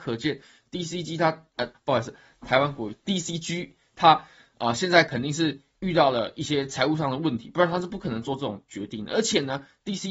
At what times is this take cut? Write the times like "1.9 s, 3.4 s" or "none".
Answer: 1.7 s